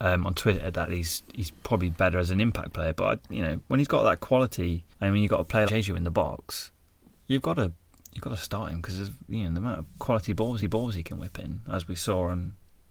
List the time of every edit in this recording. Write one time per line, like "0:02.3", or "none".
0:04.9
0:05.7
0:10.6